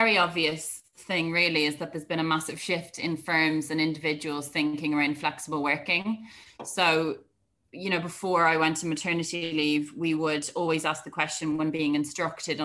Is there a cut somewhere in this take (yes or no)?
no